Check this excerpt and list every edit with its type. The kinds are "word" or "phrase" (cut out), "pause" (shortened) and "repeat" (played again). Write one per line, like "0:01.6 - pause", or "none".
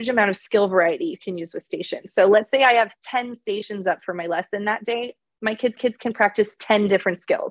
0:05.8 - repeat